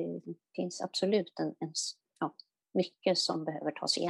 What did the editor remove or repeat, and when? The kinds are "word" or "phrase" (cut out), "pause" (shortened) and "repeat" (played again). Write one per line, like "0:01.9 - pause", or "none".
none